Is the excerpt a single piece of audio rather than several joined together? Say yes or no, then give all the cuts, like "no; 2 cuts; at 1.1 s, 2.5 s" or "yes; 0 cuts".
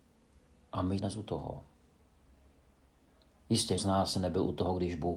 no; 2 cuts; at 1.0 s, 3.8 s